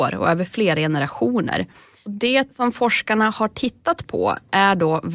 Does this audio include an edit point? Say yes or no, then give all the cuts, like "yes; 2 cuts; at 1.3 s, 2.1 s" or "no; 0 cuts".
no; 0 cuts